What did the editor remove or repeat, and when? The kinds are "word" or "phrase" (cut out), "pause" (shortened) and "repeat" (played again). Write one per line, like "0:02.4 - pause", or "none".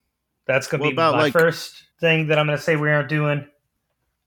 0:01.9 - pause